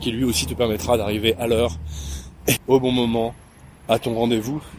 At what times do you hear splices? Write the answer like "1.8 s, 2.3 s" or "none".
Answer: 2.6 s